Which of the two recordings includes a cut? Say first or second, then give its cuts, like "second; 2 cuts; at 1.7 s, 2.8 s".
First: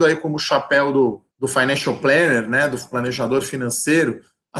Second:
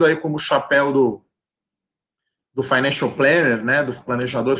first; 1 cut; at 1.3 s